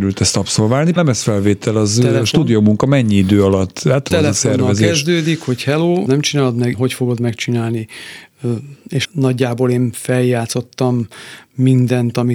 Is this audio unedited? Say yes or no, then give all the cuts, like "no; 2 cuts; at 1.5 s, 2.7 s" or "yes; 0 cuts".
no; 5 cuts; at 1.0 s, 4.1 s, 6.1 s, 6.7 s, 9.0 s